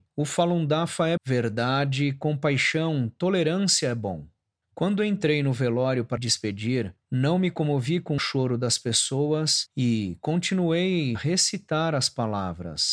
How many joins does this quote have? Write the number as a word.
four